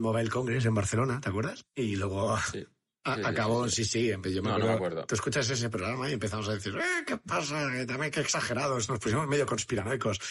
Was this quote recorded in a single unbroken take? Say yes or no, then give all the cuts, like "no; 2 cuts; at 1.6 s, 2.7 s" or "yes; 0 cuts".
yes; 0 cuts